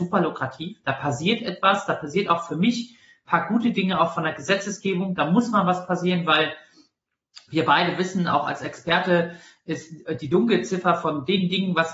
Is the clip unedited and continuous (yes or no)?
yes